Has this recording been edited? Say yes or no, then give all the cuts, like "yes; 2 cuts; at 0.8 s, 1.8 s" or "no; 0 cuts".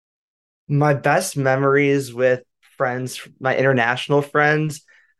no; 0 cuts